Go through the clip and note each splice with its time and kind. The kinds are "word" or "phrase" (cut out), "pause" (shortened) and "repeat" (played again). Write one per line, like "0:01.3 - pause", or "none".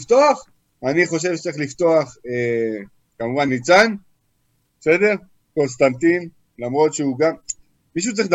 0:03.5 - word